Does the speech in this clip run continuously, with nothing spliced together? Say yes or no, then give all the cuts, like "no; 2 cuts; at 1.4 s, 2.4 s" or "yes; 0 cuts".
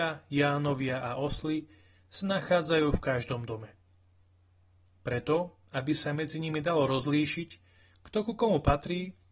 yes; 0 cuts